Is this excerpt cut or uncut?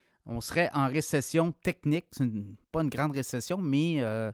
cut